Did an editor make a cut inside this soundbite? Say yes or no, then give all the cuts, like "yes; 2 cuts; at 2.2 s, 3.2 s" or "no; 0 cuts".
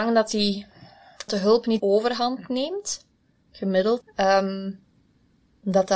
yes; 3 cuts; at 1.3 s, 1.8 s, 4.0 s